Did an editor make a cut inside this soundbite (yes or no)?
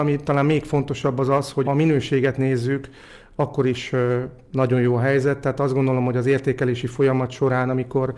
yes